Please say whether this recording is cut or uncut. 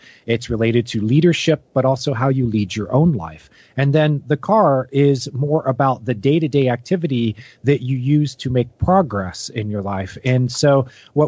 uncut